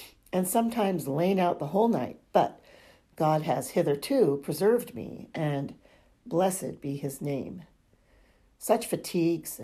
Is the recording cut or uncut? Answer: uncut